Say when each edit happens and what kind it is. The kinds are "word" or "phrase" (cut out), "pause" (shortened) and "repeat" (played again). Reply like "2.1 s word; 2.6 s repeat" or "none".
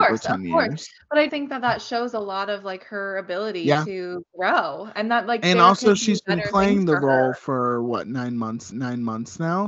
1.3 s word; 8.7 s repeat